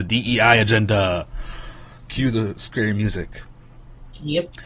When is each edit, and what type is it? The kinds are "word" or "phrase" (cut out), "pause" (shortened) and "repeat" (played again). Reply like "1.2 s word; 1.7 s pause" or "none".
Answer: none